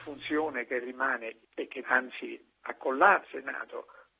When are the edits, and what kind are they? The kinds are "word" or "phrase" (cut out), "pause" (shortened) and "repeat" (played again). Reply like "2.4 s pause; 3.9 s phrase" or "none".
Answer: 1.4 s pause; 1.8 s word; 3.2 s word